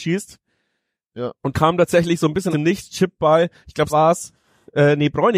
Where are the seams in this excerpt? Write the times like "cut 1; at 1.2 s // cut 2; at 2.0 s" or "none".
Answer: cut 1; at 1.5 s // cut 2; at 2.5 s // cut 3; at 3.9 s